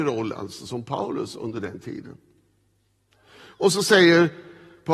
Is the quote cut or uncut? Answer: uncut